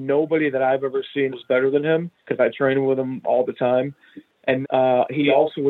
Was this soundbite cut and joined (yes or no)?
yes